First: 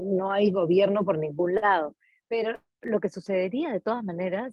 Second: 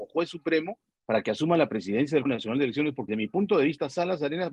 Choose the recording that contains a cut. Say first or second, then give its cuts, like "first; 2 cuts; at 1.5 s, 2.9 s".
second; 2 cuts; at 2.3 s, 3.1 s